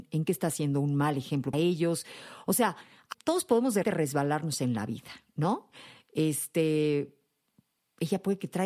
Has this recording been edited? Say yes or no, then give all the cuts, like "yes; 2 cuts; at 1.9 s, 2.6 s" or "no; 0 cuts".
yes; 3 cuts; at 1.5 s, 3.1 s, 3.8 s